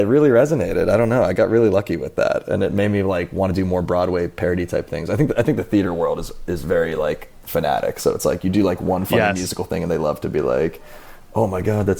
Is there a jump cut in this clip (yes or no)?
no